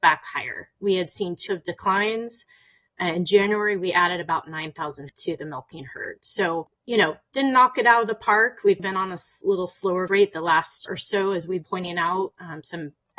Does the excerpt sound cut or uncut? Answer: cut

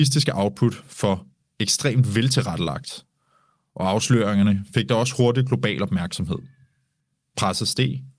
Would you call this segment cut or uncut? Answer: uncut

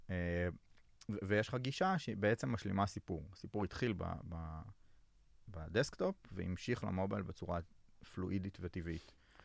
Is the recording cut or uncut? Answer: uncut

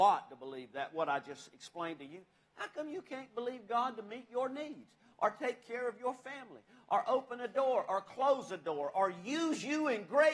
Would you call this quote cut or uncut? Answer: uncut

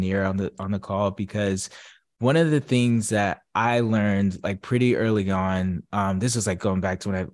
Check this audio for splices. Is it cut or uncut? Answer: uncut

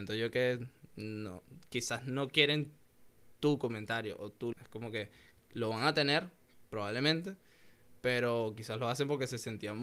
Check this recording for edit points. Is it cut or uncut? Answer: cut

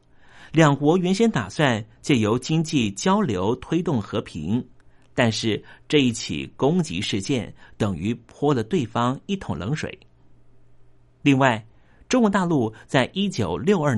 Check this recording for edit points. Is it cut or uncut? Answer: uncut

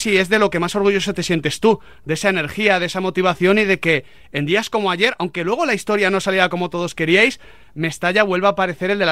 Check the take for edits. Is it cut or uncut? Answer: uncut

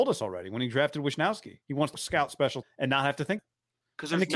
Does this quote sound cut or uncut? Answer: cut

